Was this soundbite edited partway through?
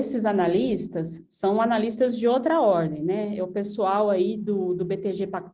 no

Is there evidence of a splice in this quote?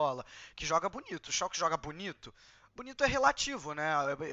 no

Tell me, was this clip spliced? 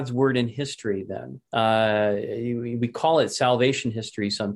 yes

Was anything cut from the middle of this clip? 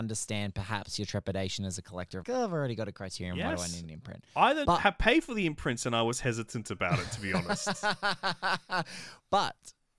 yes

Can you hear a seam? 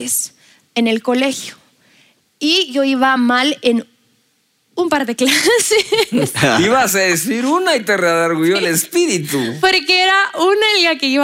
no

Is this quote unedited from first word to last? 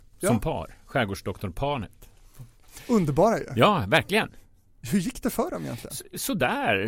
yes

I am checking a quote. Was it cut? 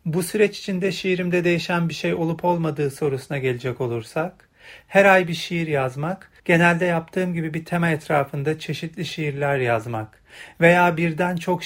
yes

